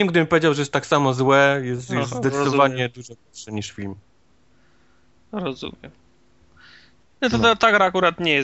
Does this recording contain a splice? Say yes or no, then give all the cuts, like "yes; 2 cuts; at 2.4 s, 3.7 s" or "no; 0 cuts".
no; 0 cuts